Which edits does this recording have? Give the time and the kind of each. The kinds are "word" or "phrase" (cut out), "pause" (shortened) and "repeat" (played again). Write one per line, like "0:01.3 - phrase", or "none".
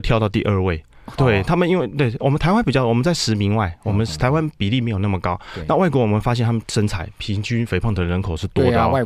0:01.2 - phrase